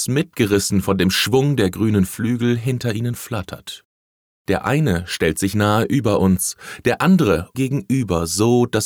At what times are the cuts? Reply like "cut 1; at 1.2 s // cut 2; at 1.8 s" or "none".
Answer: cut 1; at 7.5 s